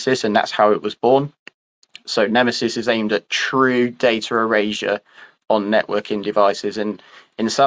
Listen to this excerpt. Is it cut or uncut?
uncut